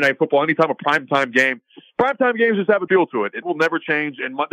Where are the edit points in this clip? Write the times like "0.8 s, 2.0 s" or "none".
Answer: 2.9 s, 3.4 s